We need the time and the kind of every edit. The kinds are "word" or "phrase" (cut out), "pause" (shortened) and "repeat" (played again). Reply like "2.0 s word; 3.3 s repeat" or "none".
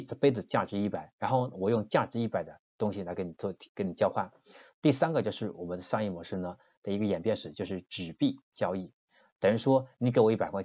3.7 s pause